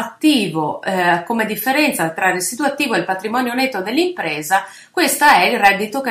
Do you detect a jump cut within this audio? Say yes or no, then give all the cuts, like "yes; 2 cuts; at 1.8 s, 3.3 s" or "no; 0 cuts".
no; 0 cuts